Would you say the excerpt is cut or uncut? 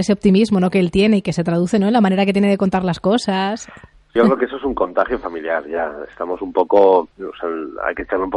cut